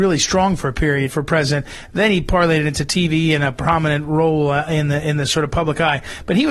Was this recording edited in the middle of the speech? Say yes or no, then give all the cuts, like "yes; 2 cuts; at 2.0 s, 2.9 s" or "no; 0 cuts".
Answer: yes; 1 cut; at 1.1 s